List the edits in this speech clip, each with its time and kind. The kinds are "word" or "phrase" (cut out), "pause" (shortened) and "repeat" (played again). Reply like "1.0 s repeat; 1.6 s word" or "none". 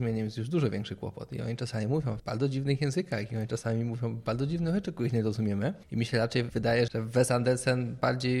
2.2 s word; 6.9 s word